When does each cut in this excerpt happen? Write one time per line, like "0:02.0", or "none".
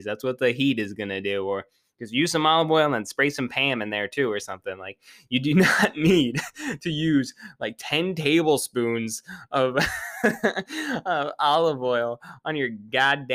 none

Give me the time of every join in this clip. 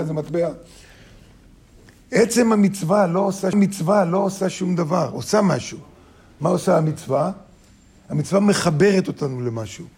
0:03.5

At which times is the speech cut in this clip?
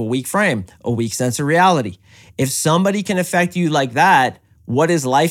none

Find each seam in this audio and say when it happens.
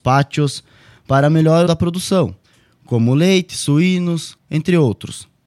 0:01.7
0:02.4
0:04.4

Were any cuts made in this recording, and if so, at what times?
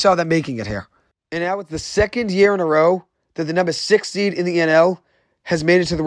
none

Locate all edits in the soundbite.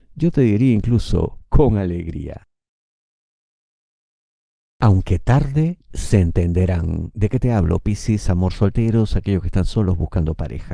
none

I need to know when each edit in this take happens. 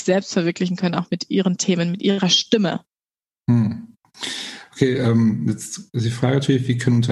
none

